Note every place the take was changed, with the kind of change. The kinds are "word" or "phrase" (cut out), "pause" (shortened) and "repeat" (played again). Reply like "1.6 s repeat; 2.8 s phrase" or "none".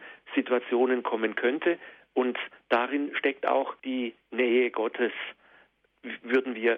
3.8 s pause